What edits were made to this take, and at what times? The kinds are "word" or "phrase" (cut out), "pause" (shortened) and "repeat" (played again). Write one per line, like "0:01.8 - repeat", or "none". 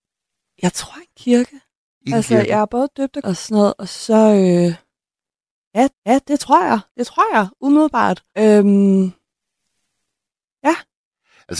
0:03.2 - word
0:05.9 - repeat
0:06.9 - pause
0:08.3 - pause